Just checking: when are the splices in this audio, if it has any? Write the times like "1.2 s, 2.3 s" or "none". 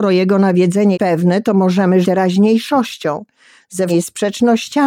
0.9 s, 2.0 s, 3.9 s